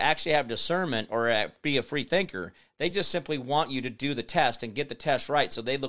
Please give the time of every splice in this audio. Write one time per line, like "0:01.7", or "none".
none